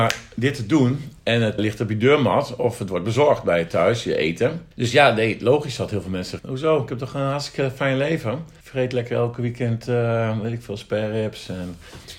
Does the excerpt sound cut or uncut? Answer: cut